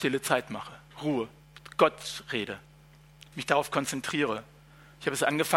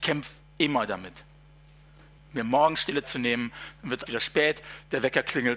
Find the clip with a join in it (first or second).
second